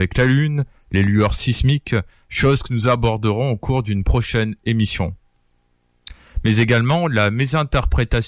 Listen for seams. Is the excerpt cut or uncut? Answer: uncut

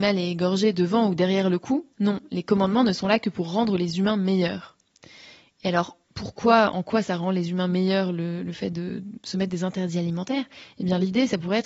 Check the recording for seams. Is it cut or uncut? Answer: cut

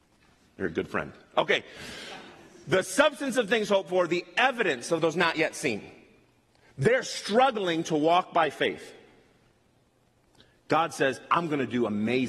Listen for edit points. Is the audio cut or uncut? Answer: uncut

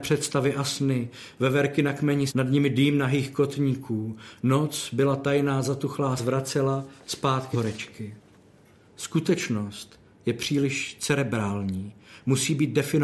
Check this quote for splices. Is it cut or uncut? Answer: cut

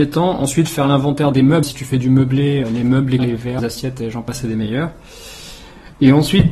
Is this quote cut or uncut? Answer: cut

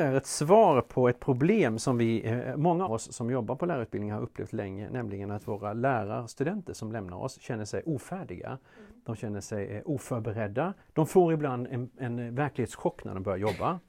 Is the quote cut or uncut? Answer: cut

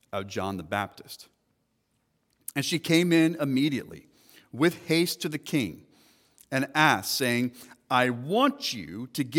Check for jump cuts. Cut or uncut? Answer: uncut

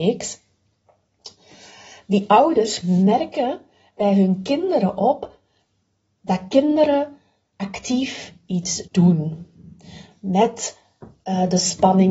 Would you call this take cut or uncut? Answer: cut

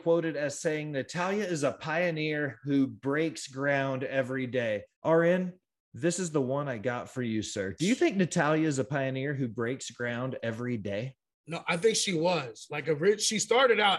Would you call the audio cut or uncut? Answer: cut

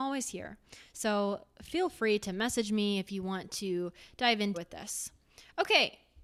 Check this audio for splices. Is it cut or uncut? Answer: cut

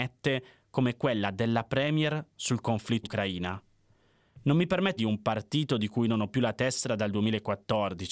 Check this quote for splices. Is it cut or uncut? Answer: cut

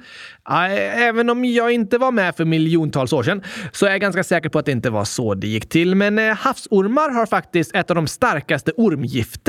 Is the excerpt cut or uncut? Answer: uncut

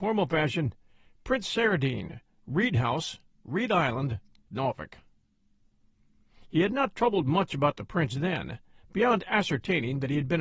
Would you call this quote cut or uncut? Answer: uncut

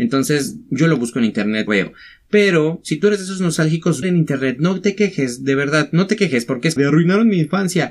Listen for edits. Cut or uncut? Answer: cut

